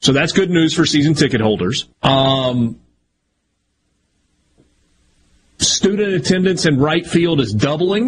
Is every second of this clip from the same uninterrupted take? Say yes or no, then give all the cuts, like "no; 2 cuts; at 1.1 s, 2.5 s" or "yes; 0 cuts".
no; 1 cut; at 1.9 s